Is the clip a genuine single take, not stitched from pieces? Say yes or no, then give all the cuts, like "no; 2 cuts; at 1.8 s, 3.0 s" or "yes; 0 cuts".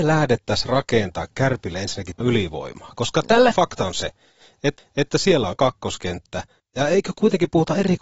no; 5 cuts; at 2.2 s, 3.5 s, 4.8 s, 5.5 s, 6.6 s